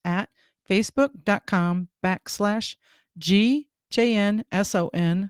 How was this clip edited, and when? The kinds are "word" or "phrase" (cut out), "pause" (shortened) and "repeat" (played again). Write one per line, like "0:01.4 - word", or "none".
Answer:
0:03.9 - word